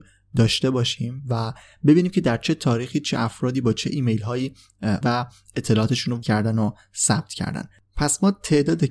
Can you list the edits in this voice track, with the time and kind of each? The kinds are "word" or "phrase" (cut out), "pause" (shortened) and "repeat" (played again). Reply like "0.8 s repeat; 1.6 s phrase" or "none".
5.0 s word; 6.2 s word